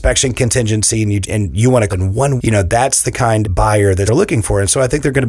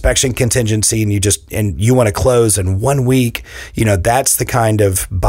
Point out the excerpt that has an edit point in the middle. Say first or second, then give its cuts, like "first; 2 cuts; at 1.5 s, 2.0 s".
first; 5 cuts; at 1.2 s, 1.9 s, 2.4 s, 3.4 s, 4.1 s